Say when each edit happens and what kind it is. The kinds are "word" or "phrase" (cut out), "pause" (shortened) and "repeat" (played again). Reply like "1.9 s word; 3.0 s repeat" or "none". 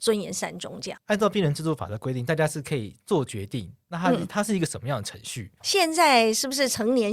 5.6 s pause